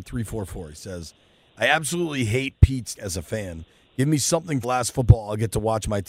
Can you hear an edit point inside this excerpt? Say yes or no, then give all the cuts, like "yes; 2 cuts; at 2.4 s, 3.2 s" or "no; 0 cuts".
yes; 2 cuts; at 3.0 s, 4.6 s